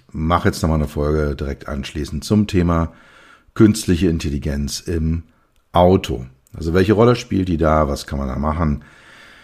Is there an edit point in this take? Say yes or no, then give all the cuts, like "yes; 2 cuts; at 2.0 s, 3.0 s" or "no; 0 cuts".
no; 0 cuts